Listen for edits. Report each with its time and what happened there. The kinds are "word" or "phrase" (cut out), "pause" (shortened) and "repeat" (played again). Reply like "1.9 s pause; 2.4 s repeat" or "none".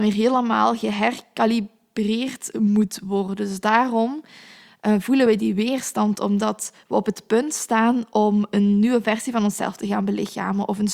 none